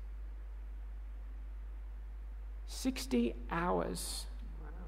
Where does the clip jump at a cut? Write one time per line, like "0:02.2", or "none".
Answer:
none